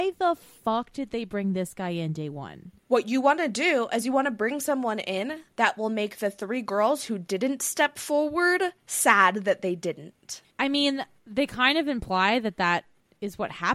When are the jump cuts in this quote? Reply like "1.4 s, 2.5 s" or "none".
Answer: 2.8 s, 10.5 s